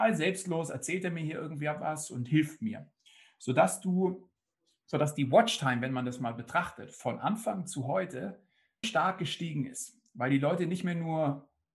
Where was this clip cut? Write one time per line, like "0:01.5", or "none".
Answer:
0:08.8